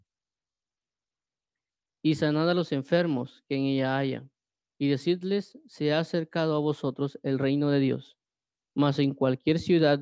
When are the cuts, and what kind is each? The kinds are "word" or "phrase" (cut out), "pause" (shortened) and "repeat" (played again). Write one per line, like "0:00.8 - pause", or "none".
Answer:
none